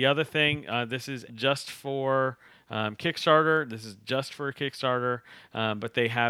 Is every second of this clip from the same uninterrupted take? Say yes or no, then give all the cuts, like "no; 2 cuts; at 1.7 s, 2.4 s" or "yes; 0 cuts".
no; 1 cut; at 1.3 s